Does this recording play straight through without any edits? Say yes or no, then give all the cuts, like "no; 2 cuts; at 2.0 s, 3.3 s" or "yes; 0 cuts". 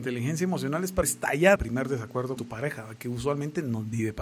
no; 3 cuts; at 1.0 s, 1.6 s, 2.4 s